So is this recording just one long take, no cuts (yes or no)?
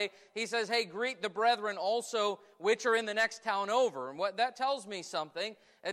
yes